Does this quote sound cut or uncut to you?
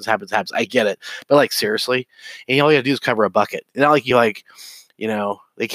uncut